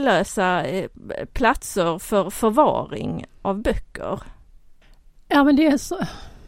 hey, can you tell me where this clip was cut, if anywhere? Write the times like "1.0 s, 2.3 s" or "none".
4.8 s

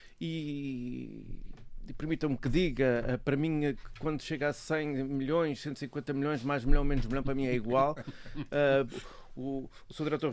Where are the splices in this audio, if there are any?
none

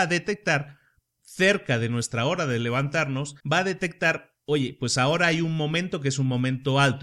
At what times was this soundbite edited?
3.4 s, 4.4 s

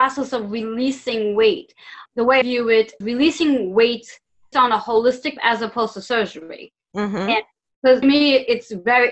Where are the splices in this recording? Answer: 2.1 s, 2.4 s, 3.0 s, 4.5 s, 5.4 s, 8.0 s

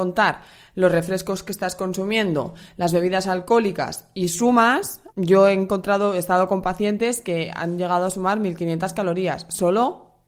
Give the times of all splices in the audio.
5.1 s

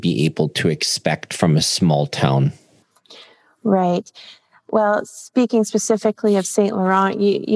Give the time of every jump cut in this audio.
none

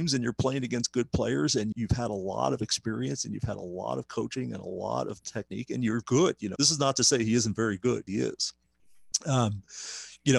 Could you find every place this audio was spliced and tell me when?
1.7 s, 6.0 s, 6.6 s, 8.1 s

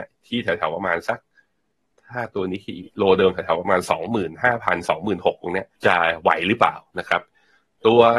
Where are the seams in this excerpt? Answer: 5.8 s

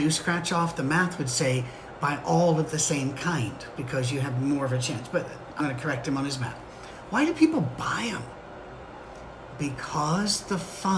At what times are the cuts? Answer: 5.6 s

